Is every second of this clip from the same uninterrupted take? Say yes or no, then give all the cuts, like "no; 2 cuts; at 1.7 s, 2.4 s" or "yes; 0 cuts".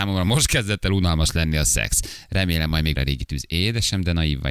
no; 1 cut; at 2.9 s